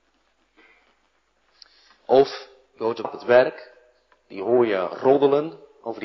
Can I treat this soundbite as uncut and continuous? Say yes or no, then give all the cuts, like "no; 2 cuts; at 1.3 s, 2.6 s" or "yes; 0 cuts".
no; 1 cut; at 3.0 s